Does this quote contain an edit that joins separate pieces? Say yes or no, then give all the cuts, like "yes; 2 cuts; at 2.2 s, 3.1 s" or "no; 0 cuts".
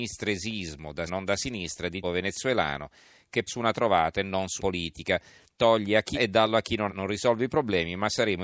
yes; 6 cuts; at 1.1 s, 2.0 s, 3.5 s, 4.6 s, 6.1 s, 6.9 s